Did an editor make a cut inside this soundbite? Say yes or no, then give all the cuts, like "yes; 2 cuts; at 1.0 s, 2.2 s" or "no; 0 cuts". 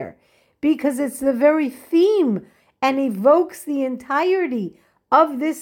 no; 0 cuts